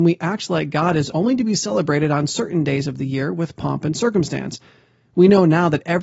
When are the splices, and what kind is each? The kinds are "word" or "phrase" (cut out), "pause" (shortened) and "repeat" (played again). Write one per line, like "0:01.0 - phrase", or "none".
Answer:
none